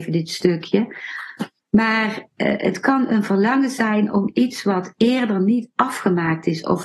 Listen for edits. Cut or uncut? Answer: cut